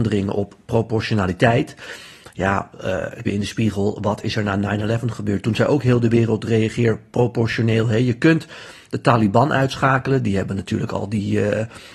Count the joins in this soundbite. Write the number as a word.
one